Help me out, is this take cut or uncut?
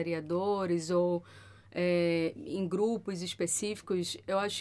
uncut